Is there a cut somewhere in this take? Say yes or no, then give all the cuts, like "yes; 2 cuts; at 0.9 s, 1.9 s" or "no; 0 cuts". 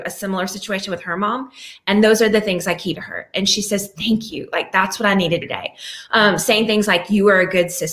yes; 2 cuts; at 2.9 s, 5.4 s